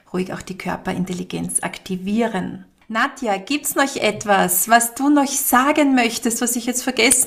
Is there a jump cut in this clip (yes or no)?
no